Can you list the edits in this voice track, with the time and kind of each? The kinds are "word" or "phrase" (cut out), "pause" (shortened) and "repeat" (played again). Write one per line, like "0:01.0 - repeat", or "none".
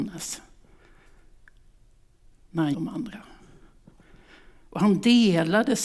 0:02.7 - phrase